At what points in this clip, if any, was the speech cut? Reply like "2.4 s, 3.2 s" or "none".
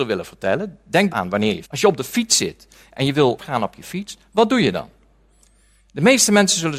1.1 s, 1.6 s, 3.4 s